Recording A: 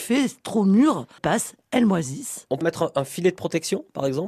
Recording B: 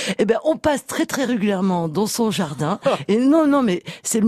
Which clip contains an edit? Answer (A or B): A